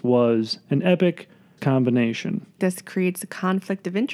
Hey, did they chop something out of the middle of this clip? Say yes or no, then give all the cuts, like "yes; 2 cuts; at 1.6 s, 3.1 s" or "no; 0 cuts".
yes; 2 cuts; at 1.6 s, 2.6 s